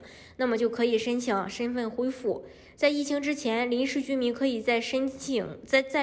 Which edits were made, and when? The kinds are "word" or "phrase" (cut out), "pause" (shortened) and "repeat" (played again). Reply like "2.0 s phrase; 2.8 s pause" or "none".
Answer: none